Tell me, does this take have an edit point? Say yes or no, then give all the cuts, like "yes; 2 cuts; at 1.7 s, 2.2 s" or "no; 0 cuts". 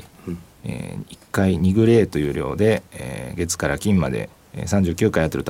no; 0 cuts